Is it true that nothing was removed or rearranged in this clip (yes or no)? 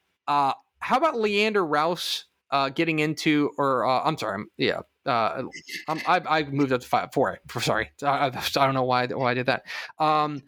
yes